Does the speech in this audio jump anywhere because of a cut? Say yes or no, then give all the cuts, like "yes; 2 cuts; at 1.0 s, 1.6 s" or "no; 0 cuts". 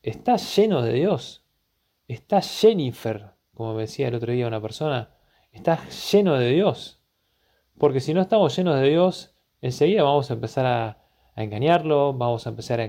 no; 0 cuts